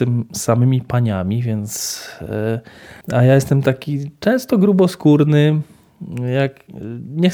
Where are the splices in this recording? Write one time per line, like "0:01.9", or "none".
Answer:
0:03.0